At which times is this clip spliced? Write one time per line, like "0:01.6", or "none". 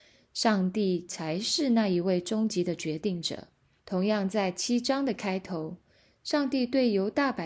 0:03.8